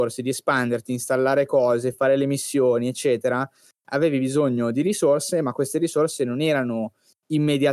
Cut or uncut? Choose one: uncut